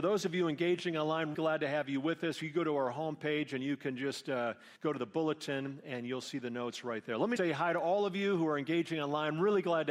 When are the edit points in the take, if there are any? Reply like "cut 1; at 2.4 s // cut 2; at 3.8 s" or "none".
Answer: cut 1; at 1.3 s // cut 2; at 4.8 s // cut 3; at 7.4 s